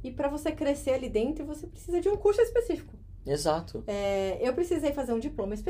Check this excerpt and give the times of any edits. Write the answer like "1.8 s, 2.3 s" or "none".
none